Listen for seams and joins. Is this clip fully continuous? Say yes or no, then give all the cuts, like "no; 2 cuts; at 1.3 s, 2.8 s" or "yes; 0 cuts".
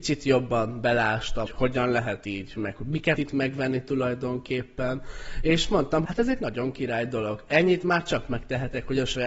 no; 4 cuts; at 1.5 s, 2.6 s, 3.2 s, 6.0 s